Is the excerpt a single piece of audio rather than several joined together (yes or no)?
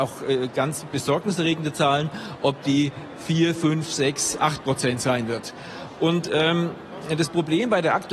yes